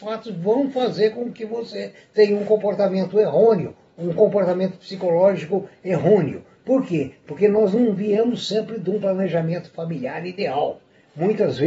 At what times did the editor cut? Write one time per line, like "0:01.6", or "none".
none